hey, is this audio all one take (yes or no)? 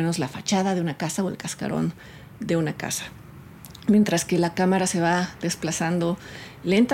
yes